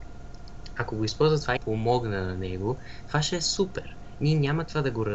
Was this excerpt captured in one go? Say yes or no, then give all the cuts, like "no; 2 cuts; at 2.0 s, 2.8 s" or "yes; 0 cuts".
no; 1 cut; at 1.6 s